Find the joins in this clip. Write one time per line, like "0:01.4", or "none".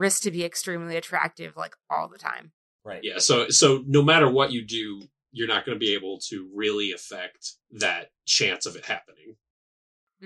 0:02.7
0:07.6